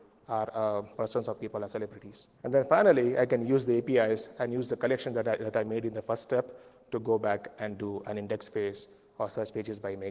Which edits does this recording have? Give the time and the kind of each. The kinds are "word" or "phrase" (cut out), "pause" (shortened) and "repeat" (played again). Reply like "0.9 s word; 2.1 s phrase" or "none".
0.9 s word; 1.4 s phrase; 2.3 s pause